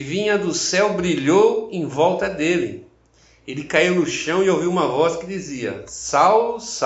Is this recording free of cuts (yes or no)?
yes